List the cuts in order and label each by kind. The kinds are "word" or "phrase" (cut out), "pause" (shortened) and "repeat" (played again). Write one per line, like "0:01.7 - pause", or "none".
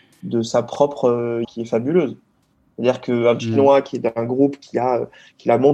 0:01.4 - word
0:03.4 - word